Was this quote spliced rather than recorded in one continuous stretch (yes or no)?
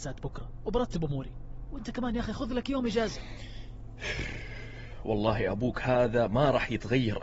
no